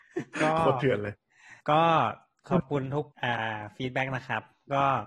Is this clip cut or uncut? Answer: cut